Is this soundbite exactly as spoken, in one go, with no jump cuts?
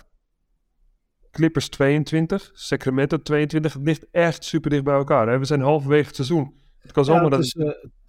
yes; 0 cuts

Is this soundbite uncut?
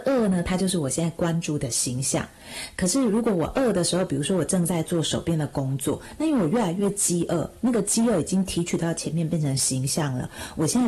yes; 0 cuts

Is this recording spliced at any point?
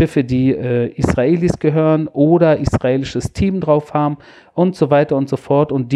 no; 0 cuts

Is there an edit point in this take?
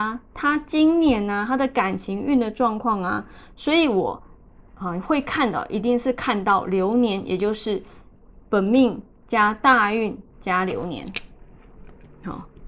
no; 0 cuts

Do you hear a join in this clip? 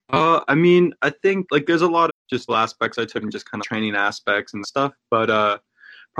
yes; 6 cuts; at 1.5 s, 2.1 s, 2.5 s, 3.2 s, 3.6 s, 4.6 s

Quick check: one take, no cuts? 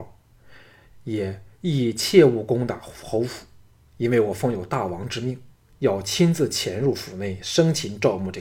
no; 1 cut; at 1.5 s

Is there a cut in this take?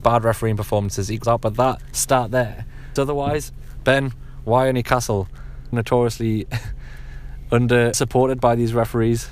yes; 4 cuts; at 1.2 s, 3.0 s, 5.7 s, 7.9 s

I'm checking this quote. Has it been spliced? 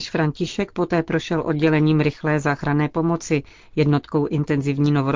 no; 0 cuts

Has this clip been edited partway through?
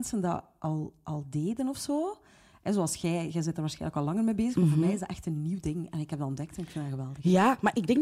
no; 0 cuts

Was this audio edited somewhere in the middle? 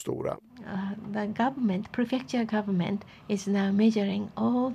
no; 0 cuts

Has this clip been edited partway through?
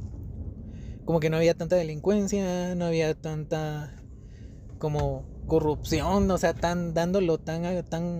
no; 0 cuts

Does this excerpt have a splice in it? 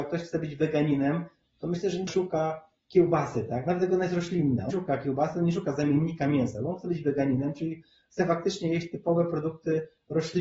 yes; 2 cuts; at 2.1 s, 4.7 s

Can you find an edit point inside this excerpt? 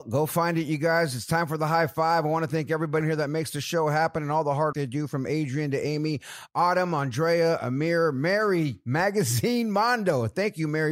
yes; 2 cuts; at 3.0 s, 4.7 s

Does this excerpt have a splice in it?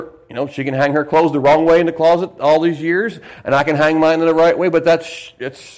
no; 0 cuts

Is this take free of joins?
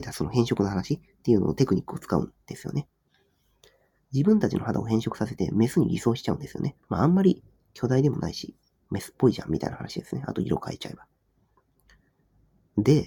no; 1 cut; at 6.8 s

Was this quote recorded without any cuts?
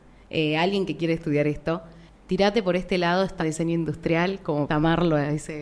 no; 3 cuts; at 2.1 s, 3.4 s, 4.7 s

